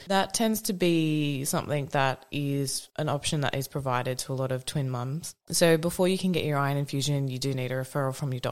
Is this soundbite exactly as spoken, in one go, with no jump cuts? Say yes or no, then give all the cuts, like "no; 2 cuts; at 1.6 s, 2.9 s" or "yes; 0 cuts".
no; 1 cut; at 5.4 s